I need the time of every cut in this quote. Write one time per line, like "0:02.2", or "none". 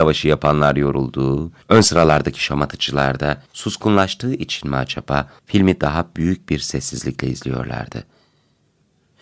0:01.6
0:03.5
0:05.4